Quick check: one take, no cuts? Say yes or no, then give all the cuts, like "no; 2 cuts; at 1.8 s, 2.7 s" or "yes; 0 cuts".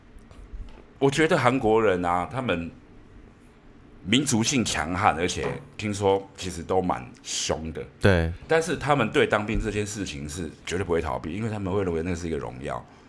no; 1 cut; at 10.6 s